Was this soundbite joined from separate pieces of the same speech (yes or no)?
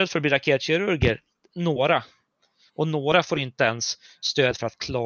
no